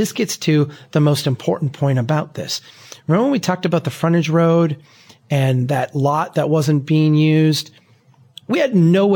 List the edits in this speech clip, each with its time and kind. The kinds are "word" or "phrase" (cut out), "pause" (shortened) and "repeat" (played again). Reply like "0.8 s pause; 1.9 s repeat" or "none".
none